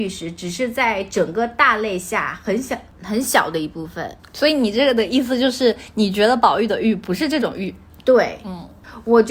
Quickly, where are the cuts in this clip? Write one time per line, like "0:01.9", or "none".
none